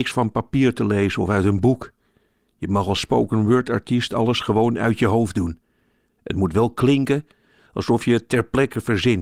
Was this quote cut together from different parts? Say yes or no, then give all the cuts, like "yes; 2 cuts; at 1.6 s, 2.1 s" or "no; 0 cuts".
no; 0 cuts